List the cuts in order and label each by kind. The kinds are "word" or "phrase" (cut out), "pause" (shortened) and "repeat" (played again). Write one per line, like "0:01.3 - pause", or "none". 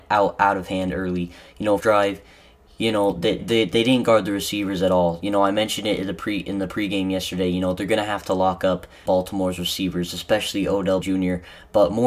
0:01.8 - word
0:03.4 - word
0:09.1 - word
0:11.0 - word